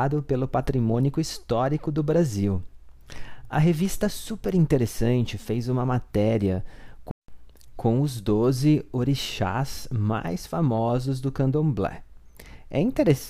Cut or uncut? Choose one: uncut